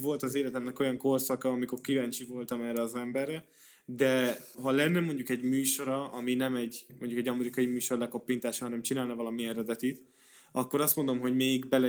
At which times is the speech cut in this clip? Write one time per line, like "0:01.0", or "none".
0:04.5